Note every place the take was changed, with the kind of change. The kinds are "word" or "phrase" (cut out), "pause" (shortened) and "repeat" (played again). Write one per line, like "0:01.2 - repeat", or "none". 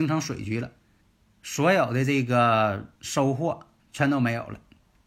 0:01.0 - pause
0:03.0 - pause
0:03.8 - pause